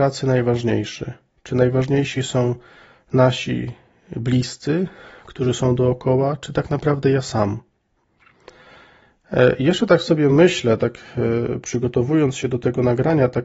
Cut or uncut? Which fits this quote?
uncut